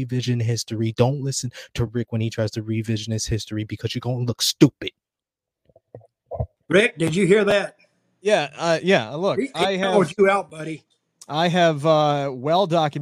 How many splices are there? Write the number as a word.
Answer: zero